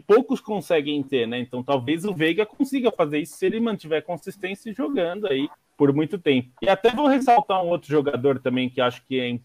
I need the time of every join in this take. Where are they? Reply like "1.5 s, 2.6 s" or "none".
5.5 s, 6.6 s